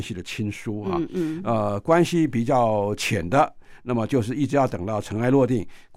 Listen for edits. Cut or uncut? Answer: uncut